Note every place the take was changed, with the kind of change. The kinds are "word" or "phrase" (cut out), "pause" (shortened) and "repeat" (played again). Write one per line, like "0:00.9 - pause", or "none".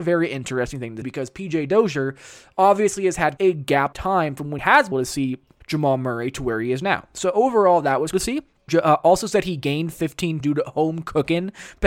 0:01.0 - word
0:03.4 - word
0:03.9 - word
0:04.6 - word
0:04.9 - word
0:05.6 - word
0:08.1 - word
0:08.7 - word
0:10.4 - word